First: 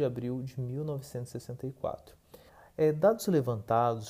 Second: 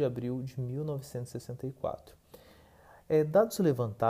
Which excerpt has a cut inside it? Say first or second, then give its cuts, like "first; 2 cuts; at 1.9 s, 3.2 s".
first; 1 cut; at 2.5 s